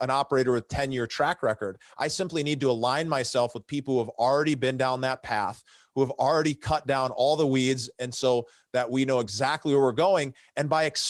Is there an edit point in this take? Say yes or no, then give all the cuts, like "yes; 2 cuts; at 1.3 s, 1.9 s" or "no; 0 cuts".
no; 0 cuts